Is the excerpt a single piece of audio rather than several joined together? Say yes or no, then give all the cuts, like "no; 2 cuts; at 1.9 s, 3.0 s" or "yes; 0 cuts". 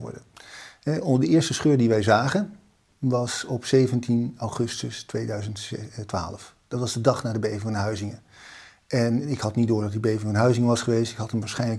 yes; 0 cuts